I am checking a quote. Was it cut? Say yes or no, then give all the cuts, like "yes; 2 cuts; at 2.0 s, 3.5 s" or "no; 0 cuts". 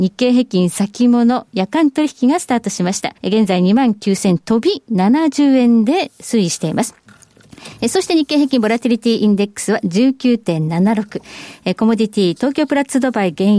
yes; 1 cut; at 3.2 s